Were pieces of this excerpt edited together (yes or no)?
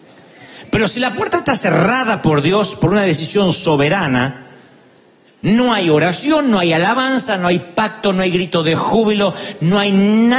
no